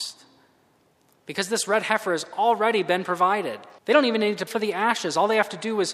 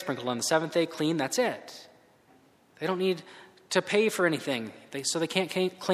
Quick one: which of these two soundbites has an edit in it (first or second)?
first